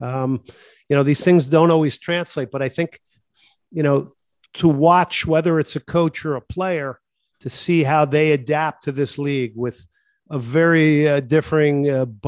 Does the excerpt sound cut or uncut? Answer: uncut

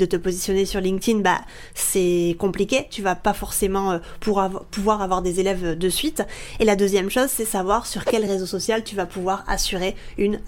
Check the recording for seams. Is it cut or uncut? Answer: uncut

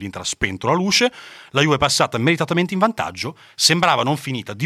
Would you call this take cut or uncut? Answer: uncut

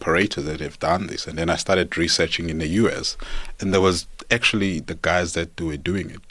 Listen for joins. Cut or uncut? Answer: uncut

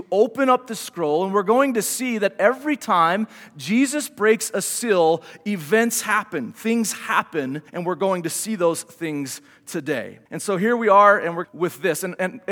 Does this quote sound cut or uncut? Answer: cut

